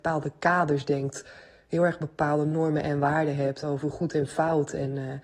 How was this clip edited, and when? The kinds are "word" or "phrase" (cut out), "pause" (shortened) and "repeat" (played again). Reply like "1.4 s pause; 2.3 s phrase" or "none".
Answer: none